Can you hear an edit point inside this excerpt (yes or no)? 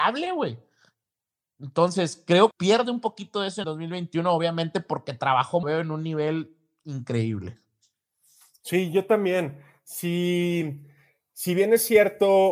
yes